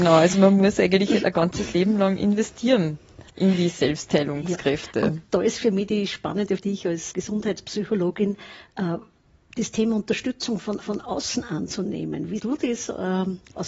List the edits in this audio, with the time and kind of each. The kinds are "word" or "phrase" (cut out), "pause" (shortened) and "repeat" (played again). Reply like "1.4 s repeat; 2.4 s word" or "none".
3.3 s pause; 6.6 s phrase; 7.1 s word; 10.8 s repeat; 12.4 s word